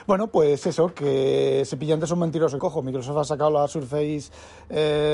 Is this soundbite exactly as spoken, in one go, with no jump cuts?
no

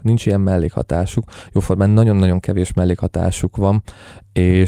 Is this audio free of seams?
yes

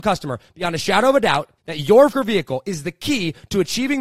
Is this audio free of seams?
no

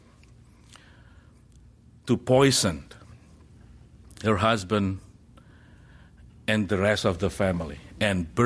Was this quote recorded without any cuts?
yes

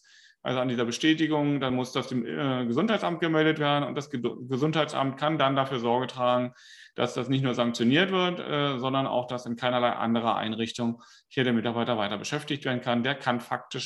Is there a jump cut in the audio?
no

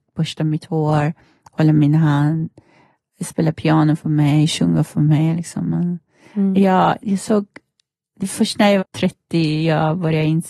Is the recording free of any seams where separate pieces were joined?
no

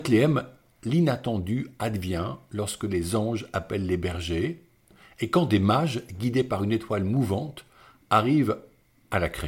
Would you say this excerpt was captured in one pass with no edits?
yes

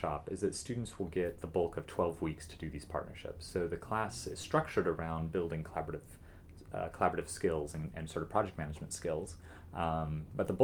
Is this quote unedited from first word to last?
yes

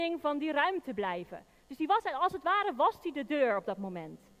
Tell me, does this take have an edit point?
no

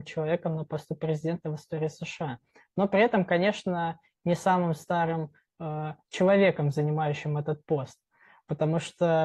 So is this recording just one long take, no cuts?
yes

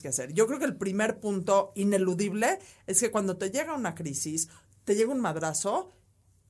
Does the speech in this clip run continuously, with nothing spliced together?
yes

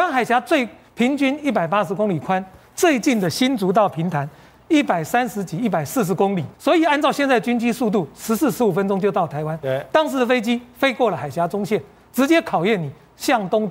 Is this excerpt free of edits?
no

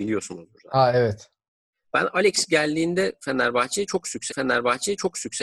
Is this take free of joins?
no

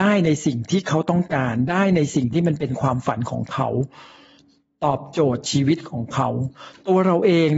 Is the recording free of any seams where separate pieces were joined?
yes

